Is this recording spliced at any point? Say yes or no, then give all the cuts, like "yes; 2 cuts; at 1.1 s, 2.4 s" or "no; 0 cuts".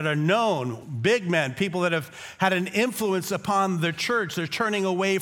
no; 0 cuts